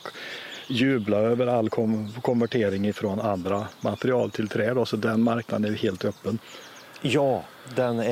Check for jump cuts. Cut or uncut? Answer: uncut